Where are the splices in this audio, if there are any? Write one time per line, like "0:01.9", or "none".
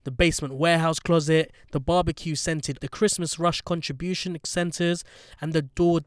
0:02.8